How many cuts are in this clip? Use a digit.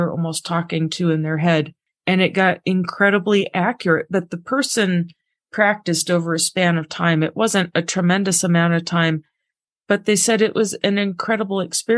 0